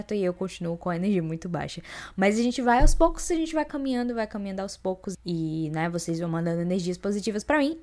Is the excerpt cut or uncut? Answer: cut